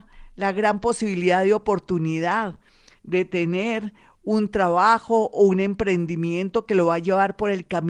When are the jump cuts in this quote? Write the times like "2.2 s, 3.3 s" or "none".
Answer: none